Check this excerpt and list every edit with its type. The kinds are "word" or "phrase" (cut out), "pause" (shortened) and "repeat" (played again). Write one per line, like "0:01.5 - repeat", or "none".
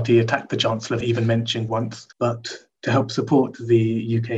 0:01.0 - phrase
0:01.7 - word
0:02.1 - pause